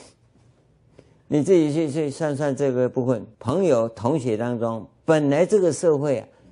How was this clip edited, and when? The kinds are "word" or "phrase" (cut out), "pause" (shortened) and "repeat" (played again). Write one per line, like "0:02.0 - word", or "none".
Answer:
0:03.3 - pause